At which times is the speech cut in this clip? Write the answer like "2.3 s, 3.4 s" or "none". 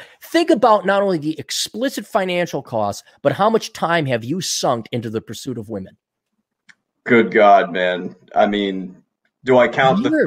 none

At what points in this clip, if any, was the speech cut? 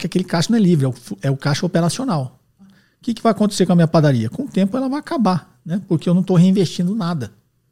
none

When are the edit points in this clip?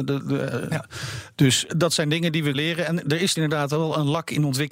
1.7 s, 2.5 s, 3.4 s

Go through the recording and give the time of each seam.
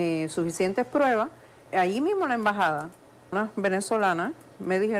1.7 s, 3.3 s

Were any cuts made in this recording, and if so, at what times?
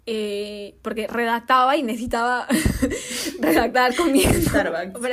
none

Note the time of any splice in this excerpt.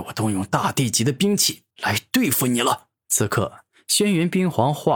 1.7 s, 3.0 s

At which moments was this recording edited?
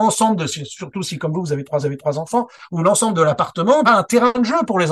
1.8 s, 3.8 s

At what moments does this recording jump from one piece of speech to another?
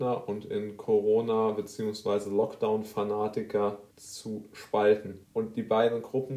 3.9 s, 5.2 s

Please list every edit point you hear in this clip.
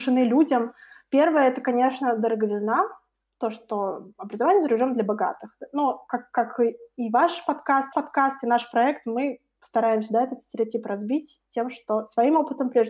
7.9 s

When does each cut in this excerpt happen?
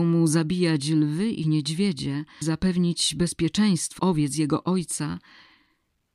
2.4 s, 4.0 s

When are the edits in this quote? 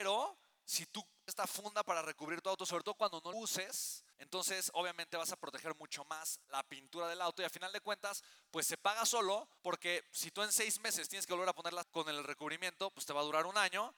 1.3 s, 3.3 s, 4.1 s, 6.4 s, 9.6 s, 11.8 s

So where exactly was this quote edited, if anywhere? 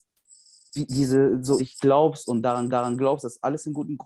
1.6 s, 2.7 s

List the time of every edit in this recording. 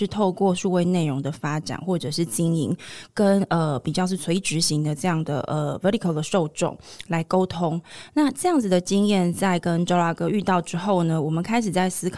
none

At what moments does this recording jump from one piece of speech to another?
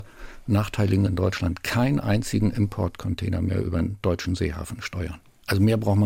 1.1 s

